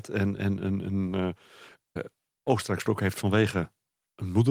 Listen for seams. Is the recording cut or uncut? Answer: cut